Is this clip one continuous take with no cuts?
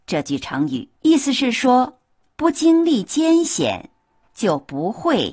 no; 2 cuts; at 1.0 s, 2.2 s

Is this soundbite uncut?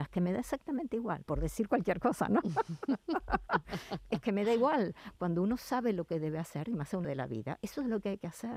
no; 1 cut; at 7.0 s

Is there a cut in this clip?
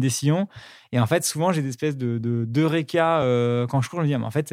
no; 0 cuts

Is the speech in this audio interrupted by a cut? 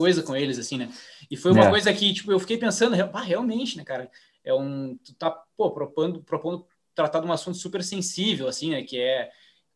no; 0 cuts

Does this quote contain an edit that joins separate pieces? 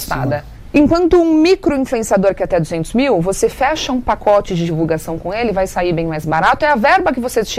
no; 0 cuts

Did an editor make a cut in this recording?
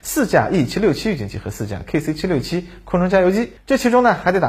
yes; 1 cut; at 3.6 s

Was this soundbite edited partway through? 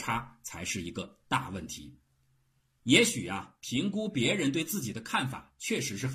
no; 0 cuts

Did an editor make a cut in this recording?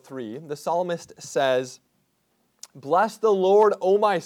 no; 0 cuts

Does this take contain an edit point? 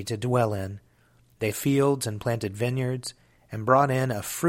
yes; 1 cut; at 1.5 s

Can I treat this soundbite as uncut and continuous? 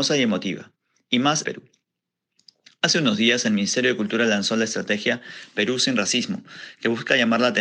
no; 1 cut; at 1.4 s

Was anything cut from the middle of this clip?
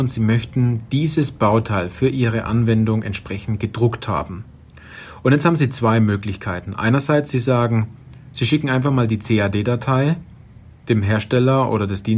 no; 0 cuts

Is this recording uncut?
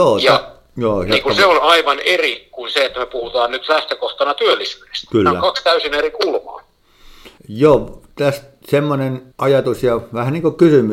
no; 2 cuts; at 7.4 s, 9.3 s

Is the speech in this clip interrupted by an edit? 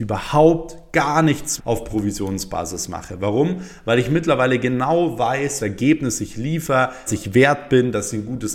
yes; 3 cuts; at 1.6 s, 5.6 s, 7.1 s

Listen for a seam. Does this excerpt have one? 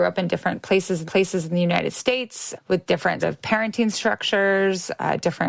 yes; 3 cuts; at 1.0 s, 2.5 s, 3.2 s

